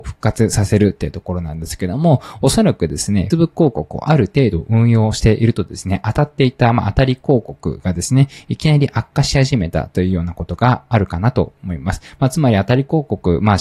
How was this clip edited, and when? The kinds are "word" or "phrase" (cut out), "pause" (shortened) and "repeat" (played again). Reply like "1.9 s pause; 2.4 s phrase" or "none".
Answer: 3.3 s word

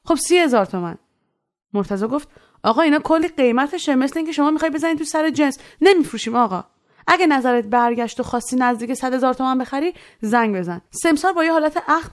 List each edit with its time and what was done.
none

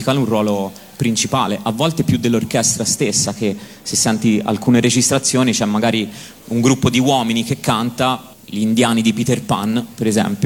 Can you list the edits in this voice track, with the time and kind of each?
none

